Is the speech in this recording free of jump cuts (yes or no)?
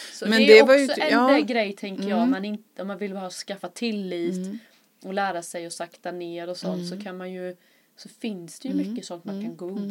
yes